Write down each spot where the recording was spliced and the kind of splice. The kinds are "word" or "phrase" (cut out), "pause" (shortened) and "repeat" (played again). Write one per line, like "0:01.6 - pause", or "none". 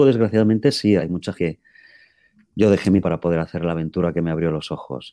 0:01.0 - word
0:01.4 - word
0:03.0 - word